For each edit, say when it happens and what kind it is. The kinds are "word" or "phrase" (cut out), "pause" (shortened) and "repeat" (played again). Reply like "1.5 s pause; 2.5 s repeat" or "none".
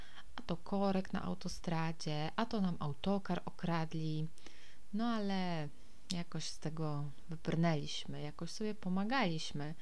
none